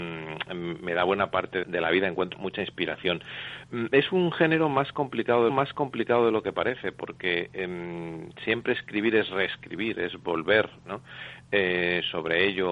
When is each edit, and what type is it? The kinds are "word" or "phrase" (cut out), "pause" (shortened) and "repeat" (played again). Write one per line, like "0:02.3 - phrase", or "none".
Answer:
0:01.6 - word
0:02.3 - word
0:05.5 - repeat